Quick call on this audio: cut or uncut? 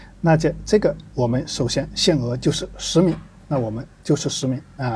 cut